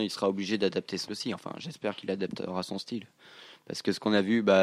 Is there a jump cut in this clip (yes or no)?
yes